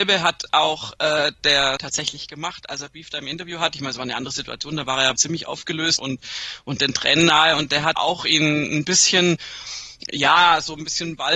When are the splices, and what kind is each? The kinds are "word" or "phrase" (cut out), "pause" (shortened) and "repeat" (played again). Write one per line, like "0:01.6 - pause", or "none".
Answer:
0:01.8 - word
0:05.2 - word
0:06.0 - word
0:08.0 - word